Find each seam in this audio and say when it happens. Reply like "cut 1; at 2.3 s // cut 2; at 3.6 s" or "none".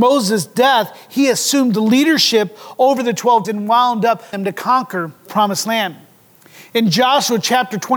cut 1; at 3.4 s // cut 2; at 4.3 s // cut 3; at 5.3 s